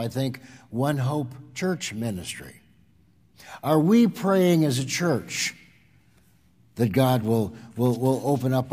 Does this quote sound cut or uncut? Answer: uncut